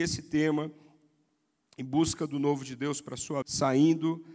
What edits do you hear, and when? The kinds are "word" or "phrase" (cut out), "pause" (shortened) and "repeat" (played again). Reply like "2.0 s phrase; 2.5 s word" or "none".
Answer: 3.4 s word